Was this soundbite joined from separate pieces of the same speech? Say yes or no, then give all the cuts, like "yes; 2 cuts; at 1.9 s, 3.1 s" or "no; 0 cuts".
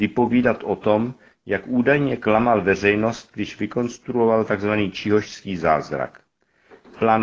no; 0 cuts